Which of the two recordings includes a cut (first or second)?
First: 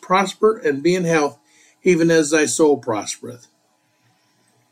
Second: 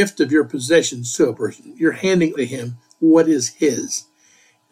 second